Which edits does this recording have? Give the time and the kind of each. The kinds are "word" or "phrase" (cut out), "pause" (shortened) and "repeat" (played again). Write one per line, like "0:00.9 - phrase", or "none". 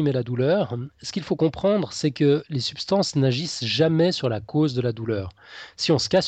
none